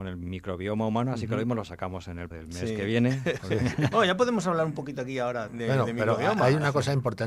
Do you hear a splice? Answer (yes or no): yes